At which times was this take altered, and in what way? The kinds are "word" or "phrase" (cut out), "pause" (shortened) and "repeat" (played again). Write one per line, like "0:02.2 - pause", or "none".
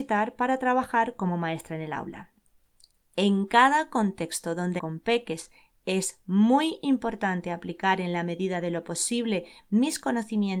0:04.8 - word